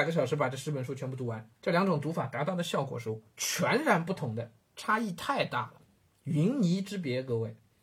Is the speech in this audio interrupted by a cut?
yes; 1 cut; at 1.6 s

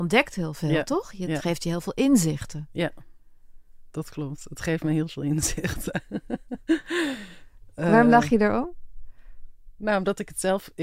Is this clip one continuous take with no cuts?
yes; 0 cuts

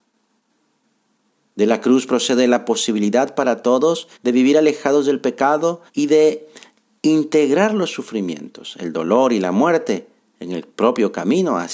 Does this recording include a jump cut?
yes; 2 cuts; at 4.1 s, 5.9 s

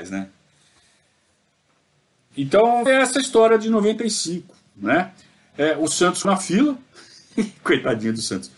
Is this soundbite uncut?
no; 2 cuts; at 2.9 s, 6.2 s

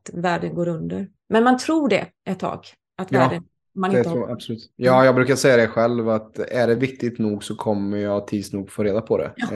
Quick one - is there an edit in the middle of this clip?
no; 0 cuts

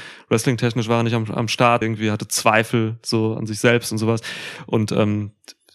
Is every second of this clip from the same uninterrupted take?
no; 1 cut; at 1.8 s

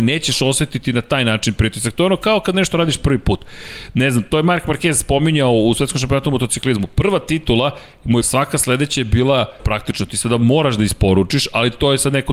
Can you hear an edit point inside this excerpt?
yes; 2 cuts; at 8.2 s, 9.6 s

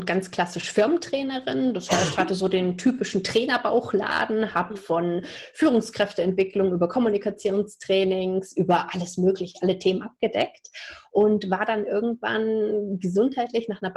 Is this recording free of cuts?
yes; 0 cuts

